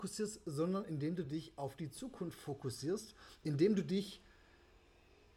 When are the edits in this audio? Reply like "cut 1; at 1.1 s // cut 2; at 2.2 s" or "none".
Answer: none